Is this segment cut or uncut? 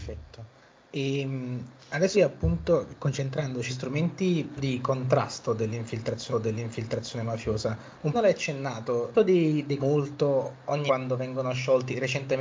cut